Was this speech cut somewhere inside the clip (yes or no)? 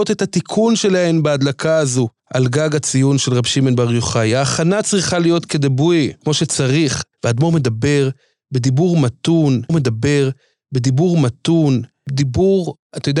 yes